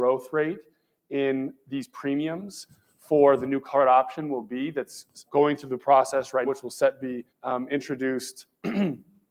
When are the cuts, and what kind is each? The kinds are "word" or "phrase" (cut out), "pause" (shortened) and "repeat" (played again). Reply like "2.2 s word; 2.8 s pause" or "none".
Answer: 5.3 s word; 6.5 s word; 7.3 s pause